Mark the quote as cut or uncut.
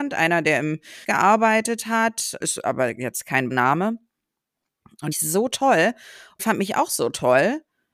cut